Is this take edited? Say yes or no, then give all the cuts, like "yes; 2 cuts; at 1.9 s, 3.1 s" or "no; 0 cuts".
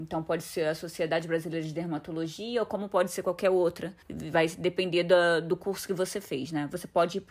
yes; 1 cut; at 4.0 s